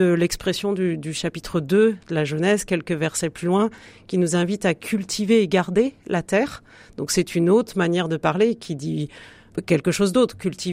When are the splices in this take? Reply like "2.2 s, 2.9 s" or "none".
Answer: none